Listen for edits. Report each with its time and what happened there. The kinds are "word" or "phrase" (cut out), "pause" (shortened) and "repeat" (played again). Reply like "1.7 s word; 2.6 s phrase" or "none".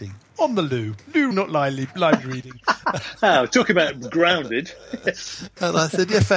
1.3 s word